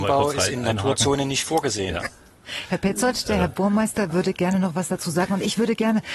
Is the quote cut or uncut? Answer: uncut